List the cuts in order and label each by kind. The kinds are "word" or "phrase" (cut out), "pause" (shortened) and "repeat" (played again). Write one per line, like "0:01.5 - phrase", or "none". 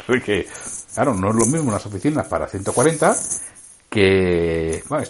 none